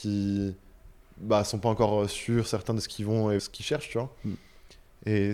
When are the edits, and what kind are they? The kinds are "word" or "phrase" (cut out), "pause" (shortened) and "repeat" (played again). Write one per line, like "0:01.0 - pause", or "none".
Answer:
0:03.4 - phrase